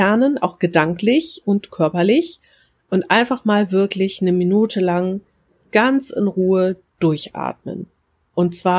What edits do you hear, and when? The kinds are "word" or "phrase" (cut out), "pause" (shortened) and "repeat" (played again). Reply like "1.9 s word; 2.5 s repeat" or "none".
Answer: none